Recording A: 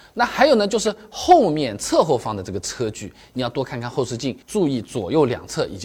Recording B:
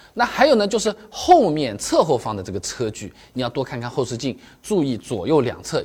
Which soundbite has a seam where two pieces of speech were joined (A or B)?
A